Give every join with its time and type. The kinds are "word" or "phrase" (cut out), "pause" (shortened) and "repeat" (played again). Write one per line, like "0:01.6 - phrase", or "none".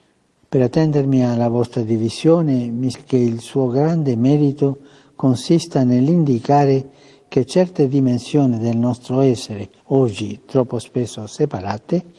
0:02.9 - word
0:09.8 - pause